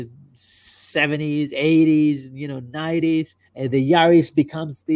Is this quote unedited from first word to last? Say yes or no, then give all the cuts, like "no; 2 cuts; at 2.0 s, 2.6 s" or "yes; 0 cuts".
no; 1 cut; at 3.5 s